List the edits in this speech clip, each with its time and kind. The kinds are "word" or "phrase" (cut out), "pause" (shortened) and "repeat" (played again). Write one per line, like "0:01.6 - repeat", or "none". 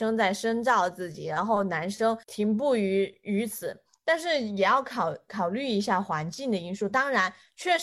0:02.2 - pause